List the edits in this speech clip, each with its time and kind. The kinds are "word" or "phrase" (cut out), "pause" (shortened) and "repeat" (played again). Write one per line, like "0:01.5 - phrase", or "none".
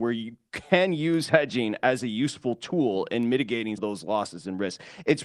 0:03.8 - word